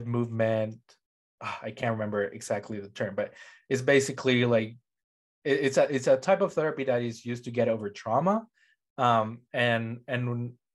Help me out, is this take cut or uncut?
uncut